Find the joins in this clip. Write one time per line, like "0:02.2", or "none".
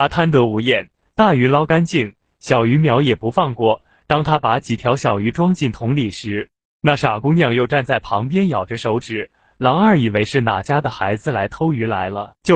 none